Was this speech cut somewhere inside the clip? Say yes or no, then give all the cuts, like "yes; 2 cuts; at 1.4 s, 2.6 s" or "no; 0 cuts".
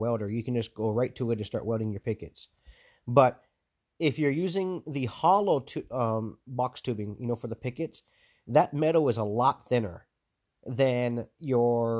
no; 0 cuts